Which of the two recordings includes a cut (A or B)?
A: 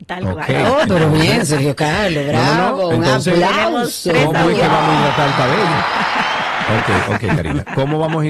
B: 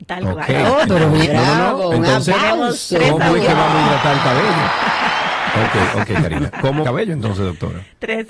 B